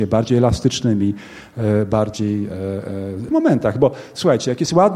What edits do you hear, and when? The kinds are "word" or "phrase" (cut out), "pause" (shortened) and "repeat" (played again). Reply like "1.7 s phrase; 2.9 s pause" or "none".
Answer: 3.3 s phrase